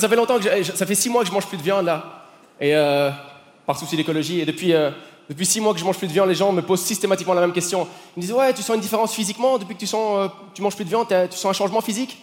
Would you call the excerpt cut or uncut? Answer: uncut